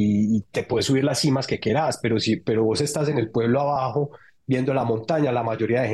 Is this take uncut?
yes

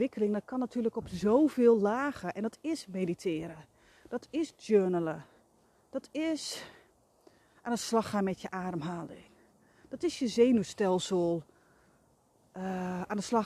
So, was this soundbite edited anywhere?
no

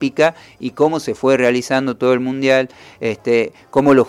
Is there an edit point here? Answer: no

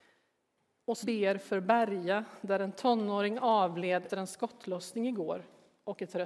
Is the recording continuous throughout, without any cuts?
no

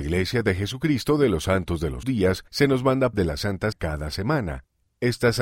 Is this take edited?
yes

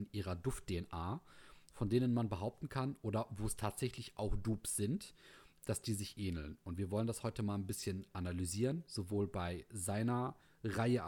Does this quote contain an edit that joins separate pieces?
no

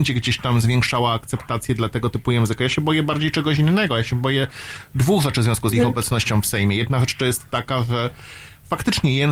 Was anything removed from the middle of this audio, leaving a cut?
no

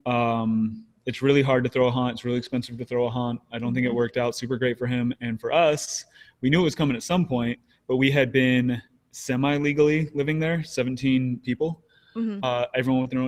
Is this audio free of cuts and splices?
yes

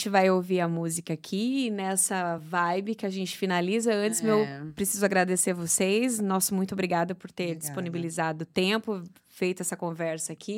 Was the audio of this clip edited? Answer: no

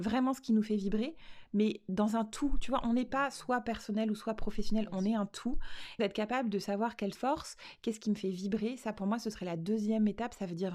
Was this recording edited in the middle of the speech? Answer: yes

